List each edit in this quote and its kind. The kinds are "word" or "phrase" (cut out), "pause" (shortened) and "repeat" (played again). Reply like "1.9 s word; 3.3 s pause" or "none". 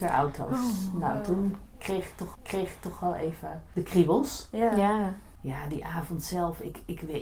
2.3 s repeat